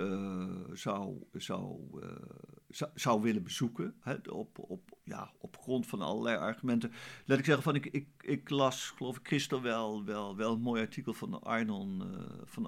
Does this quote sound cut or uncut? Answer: uncut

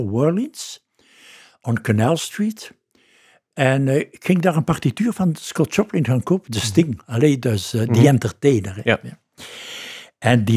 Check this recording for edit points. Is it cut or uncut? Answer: uncut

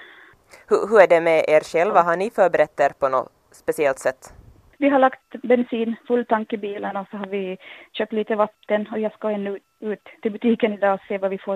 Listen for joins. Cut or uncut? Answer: uncut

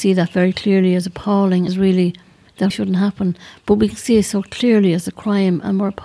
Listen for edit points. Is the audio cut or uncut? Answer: cut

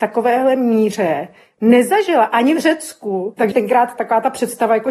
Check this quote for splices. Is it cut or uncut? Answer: cut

